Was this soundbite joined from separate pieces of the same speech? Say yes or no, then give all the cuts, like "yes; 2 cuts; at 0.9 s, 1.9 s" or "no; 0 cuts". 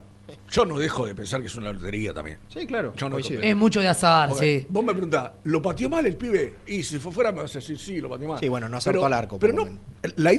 yes; 1 cut; at 2.4 s